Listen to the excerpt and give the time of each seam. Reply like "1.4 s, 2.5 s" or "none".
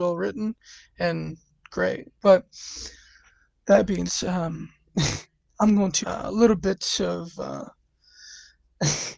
2.1 s, 4.1 s, 5.5 s, 6.0 s